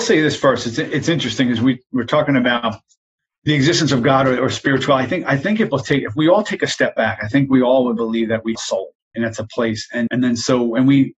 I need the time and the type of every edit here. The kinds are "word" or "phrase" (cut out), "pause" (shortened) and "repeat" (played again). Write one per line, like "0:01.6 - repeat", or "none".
0:05.7 - word
0:08.5 - word
0:09.1 - word
0:10.1 - word